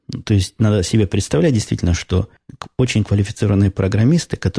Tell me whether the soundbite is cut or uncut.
uncut